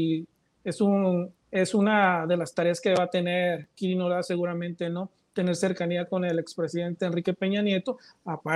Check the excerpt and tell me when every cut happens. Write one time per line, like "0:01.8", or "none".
0:01.4